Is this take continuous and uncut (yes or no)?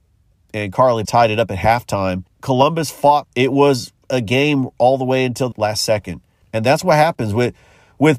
no